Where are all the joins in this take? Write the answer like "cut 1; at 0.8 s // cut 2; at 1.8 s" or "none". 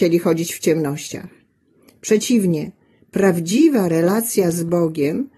none